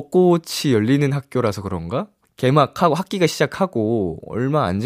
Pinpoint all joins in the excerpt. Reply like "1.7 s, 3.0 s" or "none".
none